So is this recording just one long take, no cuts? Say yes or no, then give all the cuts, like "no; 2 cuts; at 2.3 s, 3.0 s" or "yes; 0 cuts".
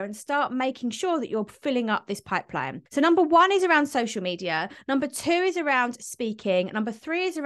yes; 0 cuts